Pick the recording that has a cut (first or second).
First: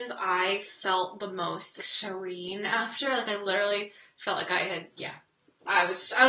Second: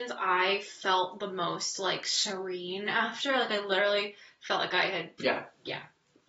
first